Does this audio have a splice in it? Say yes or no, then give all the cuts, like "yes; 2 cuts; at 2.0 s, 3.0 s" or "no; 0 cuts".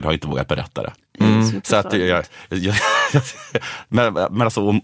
yes; 1 cut; at 1.0 s